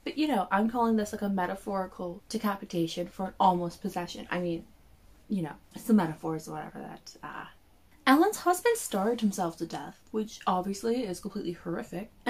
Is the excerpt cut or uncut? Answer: uncut